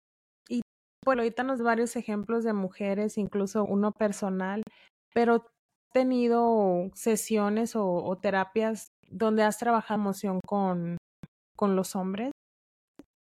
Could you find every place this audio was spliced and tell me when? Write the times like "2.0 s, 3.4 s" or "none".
1.1 s, 1.6 s, 3.7 s, 5.8 s, 8.9 s, 10.0 s

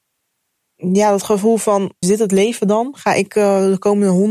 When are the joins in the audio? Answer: 2.0 s

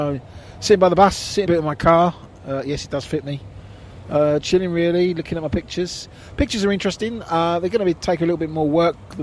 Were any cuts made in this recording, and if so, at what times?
1.5 s, 4.4 s

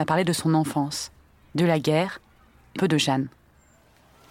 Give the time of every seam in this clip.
2.8 s

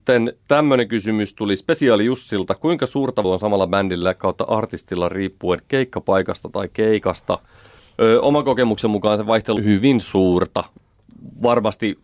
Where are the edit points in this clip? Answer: 3.2 s, 9.6 s

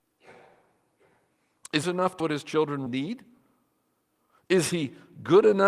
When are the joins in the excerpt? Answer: 1.8 s, 2.2 s, 2.9 s

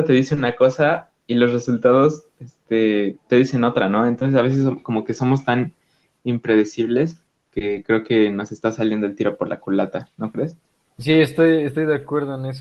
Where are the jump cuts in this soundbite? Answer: none

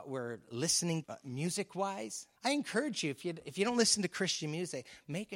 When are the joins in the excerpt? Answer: 1.0 s, 2.4 s

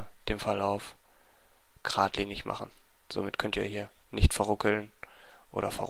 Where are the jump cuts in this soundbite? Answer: none

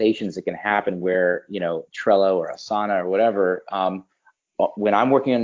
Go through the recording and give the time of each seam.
1.9 s

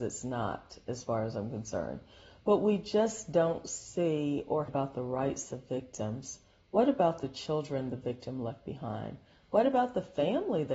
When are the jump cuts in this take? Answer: 4.7 s

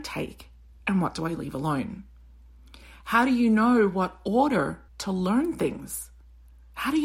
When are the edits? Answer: 4.9 s

